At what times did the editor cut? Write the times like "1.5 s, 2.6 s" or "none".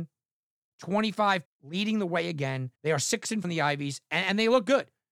1.4 s, 2.7 s, 3.4 s